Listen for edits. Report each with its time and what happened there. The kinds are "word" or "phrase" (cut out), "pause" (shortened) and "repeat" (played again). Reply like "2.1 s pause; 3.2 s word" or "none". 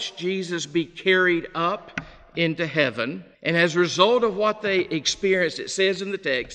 3.3 s pause